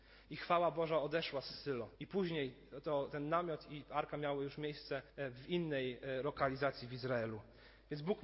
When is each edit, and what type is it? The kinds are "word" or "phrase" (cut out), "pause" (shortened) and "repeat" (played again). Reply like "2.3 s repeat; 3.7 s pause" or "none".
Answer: 2.0 s pause; 5.1 s pause